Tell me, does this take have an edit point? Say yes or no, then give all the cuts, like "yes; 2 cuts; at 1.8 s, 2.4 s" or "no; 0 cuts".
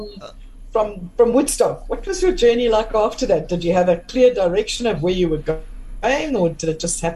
no; 0 cuts